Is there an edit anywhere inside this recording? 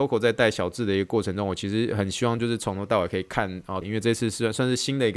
yes; 1 cut; at 3.8 s

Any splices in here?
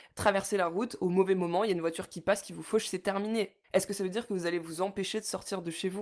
yes; 1 cut; at 3.6 s

